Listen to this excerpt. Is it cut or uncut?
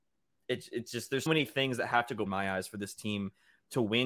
cut